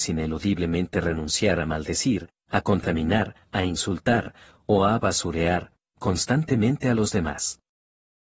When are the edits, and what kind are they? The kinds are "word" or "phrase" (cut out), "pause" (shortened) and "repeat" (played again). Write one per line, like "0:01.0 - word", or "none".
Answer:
none

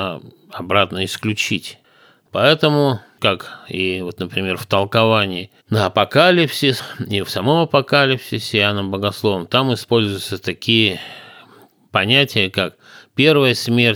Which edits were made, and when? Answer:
0:05.6 - pause

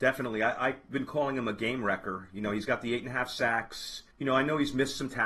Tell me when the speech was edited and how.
0:04.1 - pause

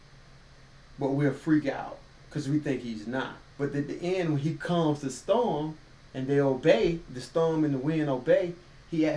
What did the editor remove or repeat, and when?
0:03.5 - pause
0:06.1 - pause

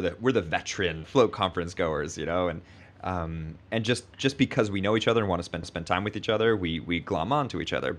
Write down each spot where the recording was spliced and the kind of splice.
0:01.0 - word
0:03.6 - pause
0:05.6 - repeat

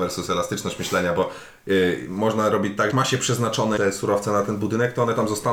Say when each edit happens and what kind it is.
0:02.9 - word
0:03.8 - word

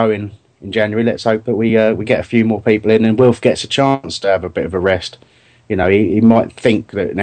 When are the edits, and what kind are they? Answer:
none

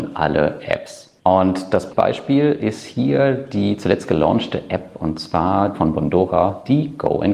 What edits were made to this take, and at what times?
0:01.2 - pause
0:01.9 - word
0:05.7 - word

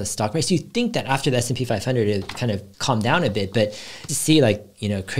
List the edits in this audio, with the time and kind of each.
0:02.7 - pause
0:04.1 - word

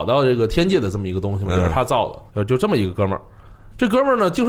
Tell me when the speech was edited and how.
0:02.3 - pause

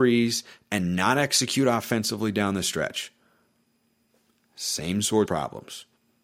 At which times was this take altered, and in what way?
0:05.3 - word

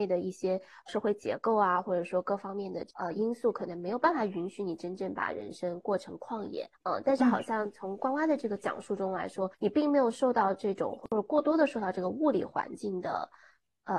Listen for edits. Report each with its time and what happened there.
0:06.7 - pause
0:09.5 - pause

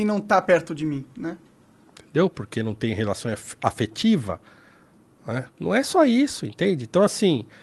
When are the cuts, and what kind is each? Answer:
0:05.5 - pause

